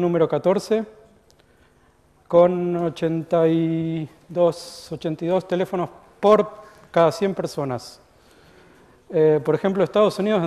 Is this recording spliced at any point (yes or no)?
no